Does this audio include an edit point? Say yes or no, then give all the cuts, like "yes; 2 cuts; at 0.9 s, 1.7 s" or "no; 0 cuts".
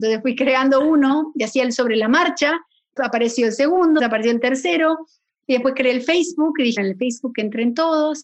yes; 3 cuts; at 3.0 s, 4.0 s, 6.8 s